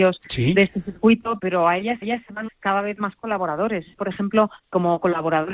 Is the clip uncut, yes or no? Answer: no